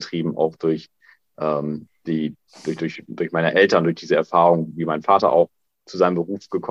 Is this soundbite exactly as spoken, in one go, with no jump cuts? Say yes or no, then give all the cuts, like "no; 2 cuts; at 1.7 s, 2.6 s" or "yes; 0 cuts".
yes; 0 cuts